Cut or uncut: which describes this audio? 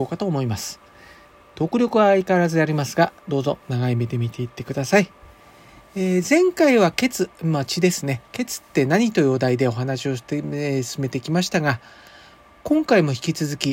uncut